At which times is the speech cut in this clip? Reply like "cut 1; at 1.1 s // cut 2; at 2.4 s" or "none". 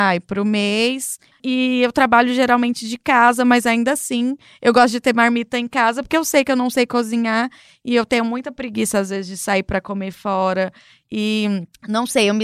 none